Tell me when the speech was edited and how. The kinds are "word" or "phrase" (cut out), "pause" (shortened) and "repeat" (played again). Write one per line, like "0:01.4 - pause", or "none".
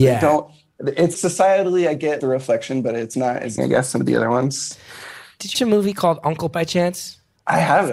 0:01.1 - word
0:02.2 - word
0:03.1 - word
0:03.6 - word
0:03.9 - word
0:05.5 - word
0:06.5 - word